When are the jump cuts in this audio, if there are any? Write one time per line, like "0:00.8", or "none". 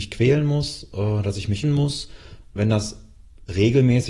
0:01.6
0:02.6